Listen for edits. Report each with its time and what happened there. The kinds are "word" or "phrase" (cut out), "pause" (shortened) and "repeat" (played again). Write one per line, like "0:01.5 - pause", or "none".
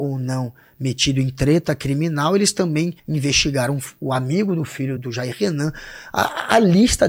0:03.0 - pause
0:05.0 - word